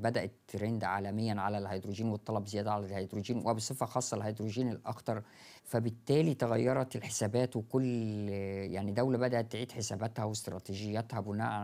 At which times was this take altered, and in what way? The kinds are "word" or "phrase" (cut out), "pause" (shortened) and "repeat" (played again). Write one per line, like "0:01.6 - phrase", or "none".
0:05.6 - pause